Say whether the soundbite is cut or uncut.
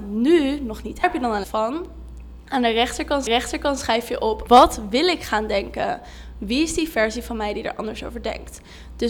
cut